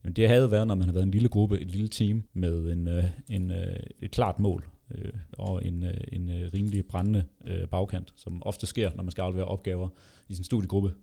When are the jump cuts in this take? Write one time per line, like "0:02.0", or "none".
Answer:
0:02.3
0:04.0
0:05.3